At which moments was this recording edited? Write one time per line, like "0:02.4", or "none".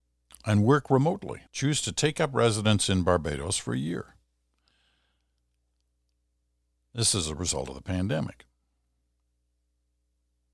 0:01.5